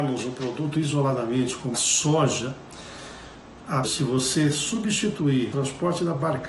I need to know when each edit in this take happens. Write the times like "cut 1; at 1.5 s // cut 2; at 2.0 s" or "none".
cut 1; at 1.7 s // cut 2; at 3.8 s // cut 3; at 5.5 s